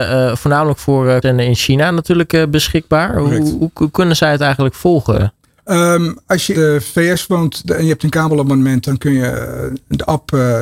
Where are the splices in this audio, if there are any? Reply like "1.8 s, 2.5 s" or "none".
1.2 s, 5.5 s, 6.5 s

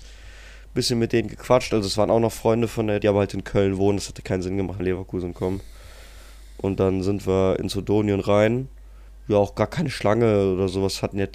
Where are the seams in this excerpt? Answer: 3.0 s, 4.8 s, 9.1 s

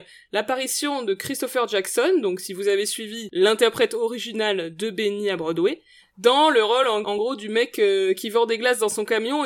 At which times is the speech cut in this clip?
none

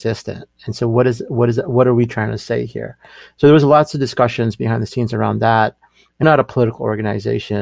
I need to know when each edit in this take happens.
6.2 s

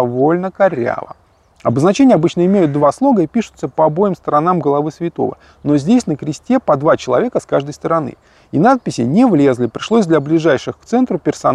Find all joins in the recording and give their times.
none

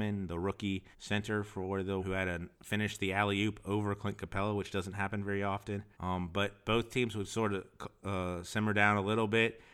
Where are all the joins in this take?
0.9 s, 2.0 s, 2.5 s, 5.9 s

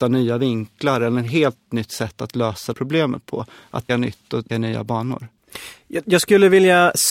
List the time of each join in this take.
2.7 s, 3.9 s, 4.5 s

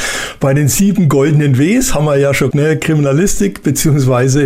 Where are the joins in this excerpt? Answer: 2.5 s

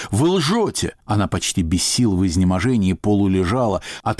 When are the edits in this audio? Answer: 1.0 s

